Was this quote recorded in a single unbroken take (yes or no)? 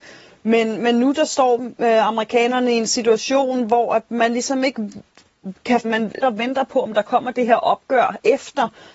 no